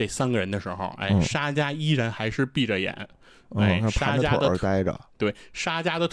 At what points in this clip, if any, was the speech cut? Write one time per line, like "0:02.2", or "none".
none